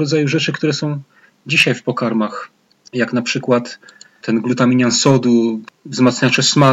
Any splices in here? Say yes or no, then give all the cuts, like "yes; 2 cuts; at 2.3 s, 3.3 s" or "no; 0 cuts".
no; 0 cuts